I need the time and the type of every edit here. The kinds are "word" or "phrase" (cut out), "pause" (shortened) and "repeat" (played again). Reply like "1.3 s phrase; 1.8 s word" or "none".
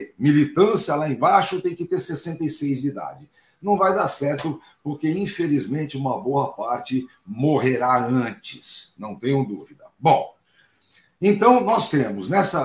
none